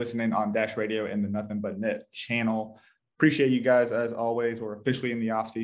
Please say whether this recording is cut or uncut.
uncut